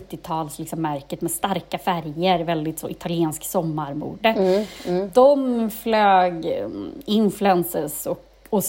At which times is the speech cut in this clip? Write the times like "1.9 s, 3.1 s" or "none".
none